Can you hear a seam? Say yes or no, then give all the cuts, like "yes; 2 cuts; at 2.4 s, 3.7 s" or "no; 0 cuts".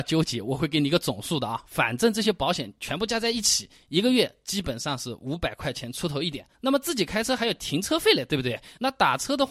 yes; 1 cut; at 6.5 s